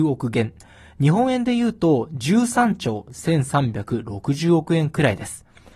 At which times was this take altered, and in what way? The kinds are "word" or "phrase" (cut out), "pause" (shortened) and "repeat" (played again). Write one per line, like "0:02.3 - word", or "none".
none